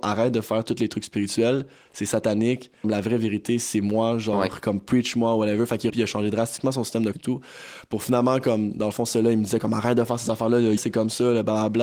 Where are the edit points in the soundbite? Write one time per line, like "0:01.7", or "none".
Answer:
0:02.8
0:05.9
0:07.1
0:10.8

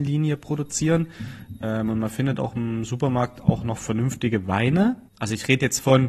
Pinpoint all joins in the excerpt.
0:05.1

